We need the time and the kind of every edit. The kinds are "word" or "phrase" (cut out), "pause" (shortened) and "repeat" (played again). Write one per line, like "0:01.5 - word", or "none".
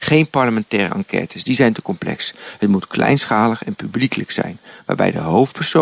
none